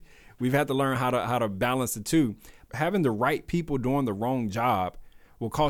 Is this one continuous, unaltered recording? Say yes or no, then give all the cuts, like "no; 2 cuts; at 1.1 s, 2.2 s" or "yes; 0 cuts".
yes; 0 cuts